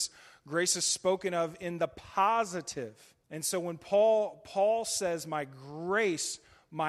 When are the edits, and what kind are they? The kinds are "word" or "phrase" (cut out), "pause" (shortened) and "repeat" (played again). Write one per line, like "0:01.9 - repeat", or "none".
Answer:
0:03.2 - pause